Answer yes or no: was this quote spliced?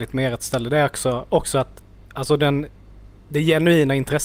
no